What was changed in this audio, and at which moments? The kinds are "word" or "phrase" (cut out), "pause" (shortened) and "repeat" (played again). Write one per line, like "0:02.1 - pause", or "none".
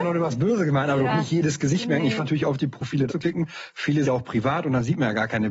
0:01.1 - phrase
0:02.2 - word
0:03.1 - word
0:04.0 - word